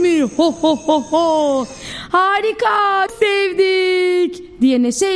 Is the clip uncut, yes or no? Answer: no